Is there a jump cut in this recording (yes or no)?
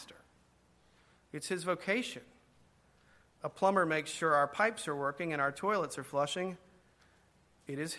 no